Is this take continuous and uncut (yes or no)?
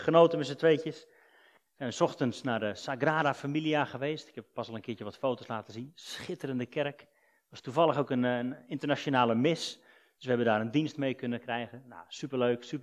yes